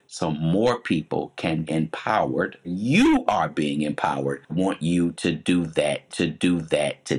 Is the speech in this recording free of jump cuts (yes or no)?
no